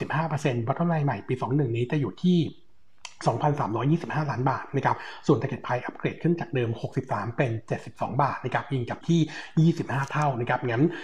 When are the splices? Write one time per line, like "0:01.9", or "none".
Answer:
0:09.0